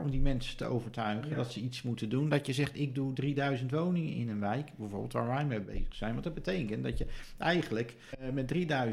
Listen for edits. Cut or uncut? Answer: cut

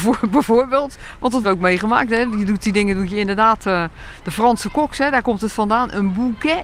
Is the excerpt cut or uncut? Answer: cut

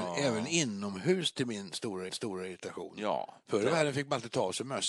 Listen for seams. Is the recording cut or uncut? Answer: cut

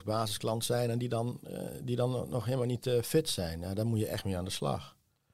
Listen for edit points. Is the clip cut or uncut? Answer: uncut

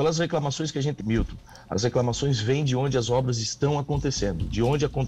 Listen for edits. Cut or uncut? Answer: cut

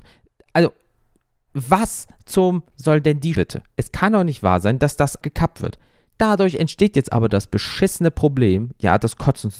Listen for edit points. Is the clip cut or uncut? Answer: cut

